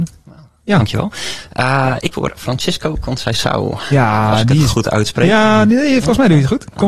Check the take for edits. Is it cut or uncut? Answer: cut